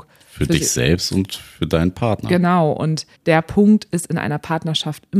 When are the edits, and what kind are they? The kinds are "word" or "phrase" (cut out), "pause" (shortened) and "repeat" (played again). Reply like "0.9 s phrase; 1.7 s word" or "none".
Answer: 3.2 s pause